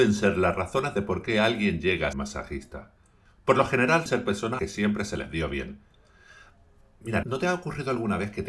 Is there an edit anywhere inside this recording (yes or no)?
yes